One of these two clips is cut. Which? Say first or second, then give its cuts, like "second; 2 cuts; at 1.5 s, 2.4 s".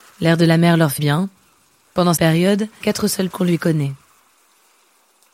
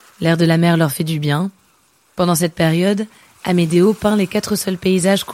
first; 4 cuts; at 1.0 s, 2.2 s, 2.8 s, 3.3 s